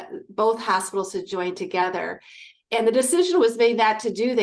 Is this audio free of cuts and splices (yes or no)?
yes